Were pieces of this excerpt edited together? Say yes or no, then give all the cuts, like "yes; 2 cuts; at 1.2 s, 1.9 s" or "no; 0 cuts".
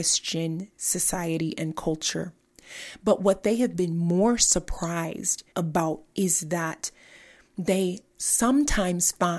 yes; 1 cut; at 5.5 s